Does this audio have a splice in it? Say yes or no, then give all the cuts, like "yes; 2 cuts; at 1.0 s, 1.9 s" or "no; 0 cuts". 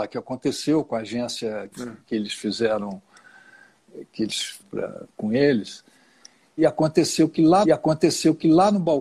yes; 4 cuts; at 1.7 s, 4.6 s, 6.6 s, 7.6 s